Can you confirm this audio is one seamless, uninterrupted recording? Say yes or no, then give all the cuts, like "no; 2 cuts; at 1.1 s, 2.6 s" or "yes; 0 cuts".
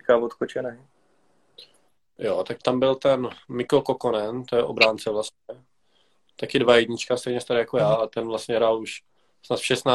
no; 1 cut; at 2.6 s